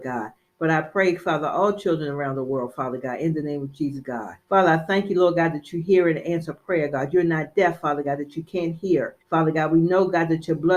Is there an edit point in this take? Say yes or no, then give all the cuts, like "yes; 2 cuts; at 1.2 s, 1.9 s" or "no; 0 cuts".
yes; 2 cuts; at 4.4 s, 9.2 s